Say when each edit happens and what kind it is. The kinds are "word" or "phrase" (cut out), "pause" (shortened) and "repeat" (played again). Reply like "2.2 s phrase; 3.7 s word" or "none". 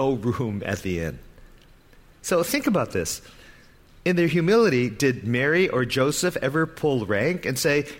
none